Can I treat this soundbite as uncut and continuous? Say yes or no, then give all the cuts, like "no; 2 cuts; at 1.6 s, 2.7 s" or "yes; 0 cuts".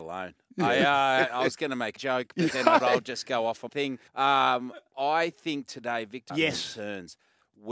no; 5 cuts; at 2.0 s, 2.8 s, 3.7 s, 4.1 s, 6.3 s